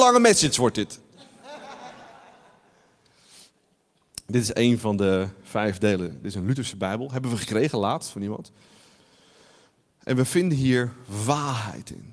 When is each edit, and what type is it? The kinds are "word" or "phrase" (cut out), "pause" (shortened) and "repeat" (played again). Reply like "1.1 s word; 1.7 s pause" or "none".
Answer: none